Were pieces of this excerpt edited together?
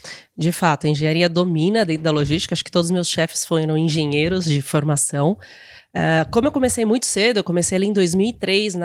no; 0 cuts

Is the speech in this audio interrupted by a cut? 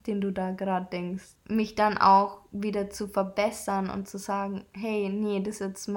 yes; 1 cut; at 1.4 s

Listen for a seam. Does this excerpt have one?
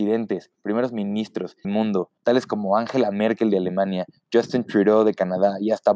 yes; 2 cuts; at 1.6 s, 2.2 s

